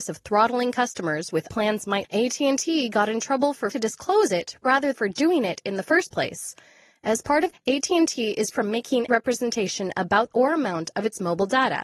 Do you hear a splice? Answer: yes; 8 cuts; at 1.5 s, 2.0 s, 3.7 s, 4.9 s, 7.5 s, 8.5 s, 9.1 s, 10.3 s

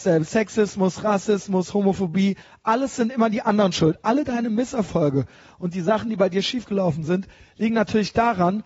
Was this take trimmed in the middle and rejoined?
no; 0 cuts

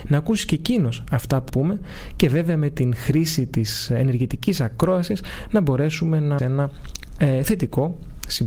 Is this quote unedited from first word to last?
no; 2 cuts; at 1.5 s, 6.4 s

